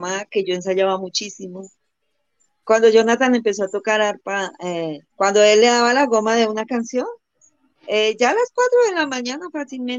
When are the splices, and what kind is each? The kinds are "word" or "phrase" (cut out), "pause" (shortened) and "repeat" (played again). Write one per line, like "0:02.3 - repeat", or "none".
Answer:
0:05.1 - pause